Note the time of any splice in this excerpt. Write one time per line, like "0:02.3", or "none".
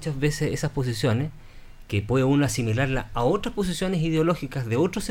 none

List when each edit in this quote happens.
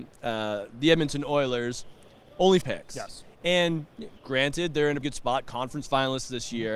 0:02.6
0:04.2
0:05.0

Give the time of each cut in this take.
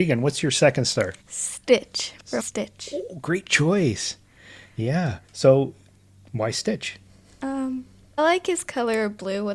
0:01.2
0:02.4
0:05.2
0:08.2

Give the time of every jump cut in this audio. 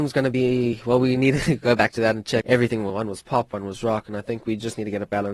0:02.4

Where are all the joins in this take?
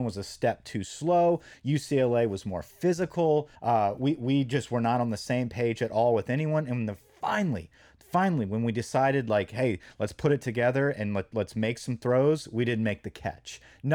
0:03.6

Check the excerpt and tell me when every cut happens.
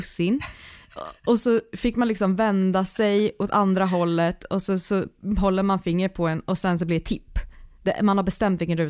none

